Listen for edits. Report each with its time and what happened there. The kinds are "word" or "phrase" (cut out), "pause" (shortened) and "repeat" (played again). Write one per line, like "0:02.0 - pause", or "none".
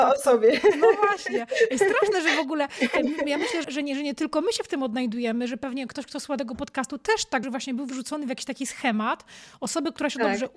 0:03.6 - word
0:07.4 - word